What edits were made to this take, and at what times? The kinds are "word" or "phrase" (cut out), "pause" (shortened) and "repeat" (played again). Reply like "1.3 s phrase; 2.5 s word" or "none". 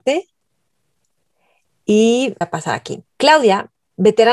2.4 s word; 3.1 s pause